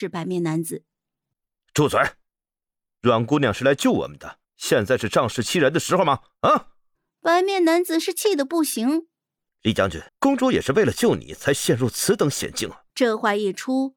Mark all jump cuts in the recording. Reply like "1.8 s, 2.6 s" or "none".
4.4 s, 6.9 s, 9.4 s, 10.1 s, 12.9 s